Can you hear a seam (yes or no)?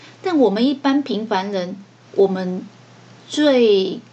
no